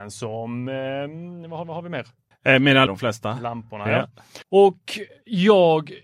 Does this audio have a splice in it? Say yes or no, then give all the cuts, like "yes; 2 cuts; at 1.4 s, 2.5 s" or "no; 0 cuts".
yes; 4 cuts; at 1.6 s, 2.3 s, 2.9 s, 4.4 s